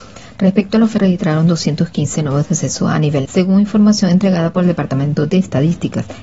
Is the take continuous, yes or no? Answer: no